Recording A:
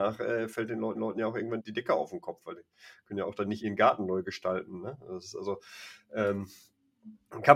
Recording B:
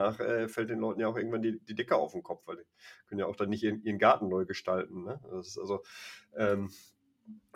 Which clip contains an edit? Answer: A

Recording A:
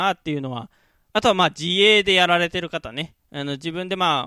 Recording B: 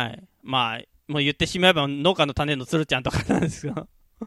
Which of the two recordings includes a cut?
A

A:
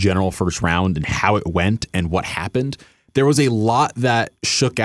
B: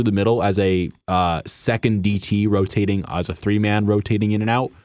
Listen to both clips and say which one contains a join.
B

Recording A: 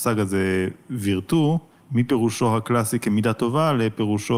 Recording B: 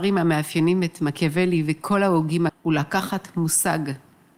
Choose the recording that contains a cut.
B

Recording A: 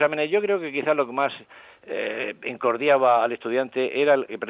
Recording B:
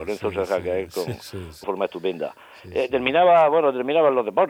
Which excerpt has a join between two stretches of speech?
B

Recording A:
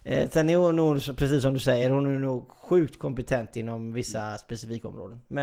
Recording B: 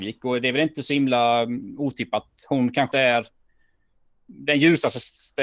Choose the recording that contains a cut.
B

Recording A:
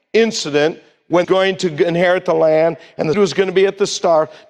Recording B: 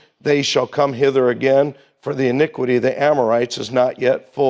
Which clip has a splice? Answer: A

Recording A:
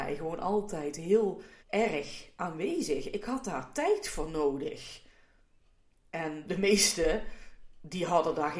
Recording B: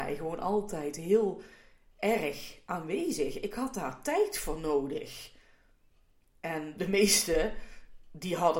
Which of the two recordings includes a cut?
A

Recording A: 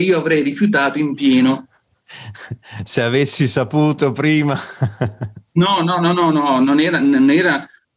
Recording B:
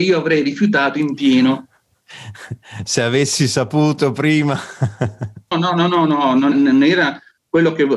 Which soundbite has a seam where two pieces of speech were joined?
B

